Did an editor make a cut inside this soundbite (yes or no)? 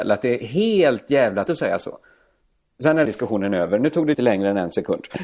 yes